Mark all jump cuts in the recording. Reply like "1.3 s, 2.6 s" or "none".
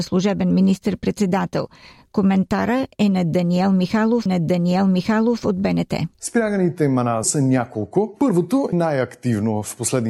4.3 s, 6.1 s, 7.2 s, 8.7 s

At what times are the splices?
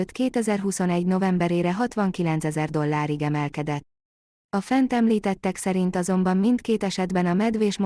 none

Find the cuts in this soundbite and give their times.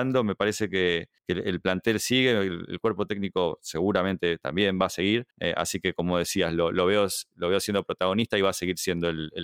1.2 s, 5.3 s

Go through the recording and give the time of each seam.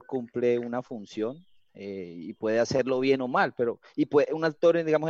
none

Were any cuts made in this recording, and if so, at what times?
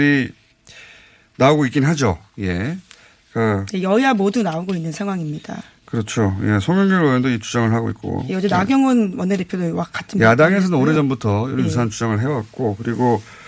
none

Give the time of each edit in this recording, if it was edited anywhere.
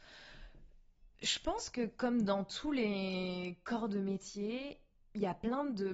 1.1 s

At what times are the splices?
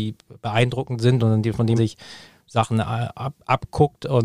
1.8 s

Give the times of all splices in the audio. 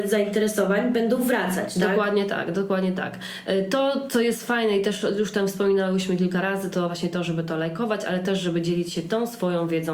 none

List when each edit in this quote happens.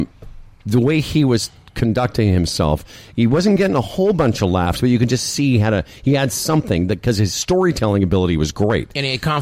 none

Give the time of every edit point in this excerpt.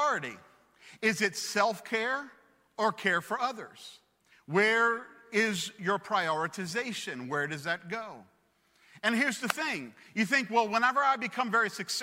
4.2 s

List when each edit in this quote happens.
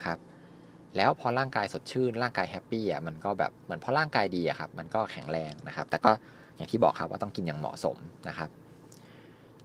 3.6 s

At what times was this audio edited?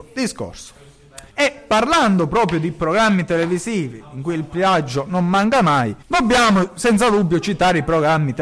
1.3 s, 6.0 s

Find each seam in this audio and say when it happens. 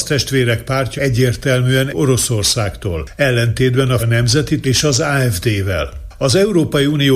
1.0 s, 1.9 s, 4.0 s, 4.6 s

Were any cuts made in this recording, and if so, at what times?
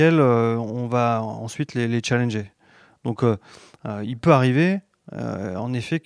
none

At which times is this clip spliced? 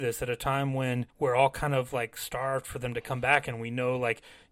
1.1 s

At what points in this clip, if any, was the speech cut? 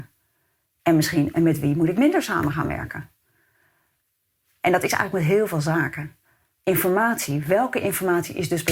none

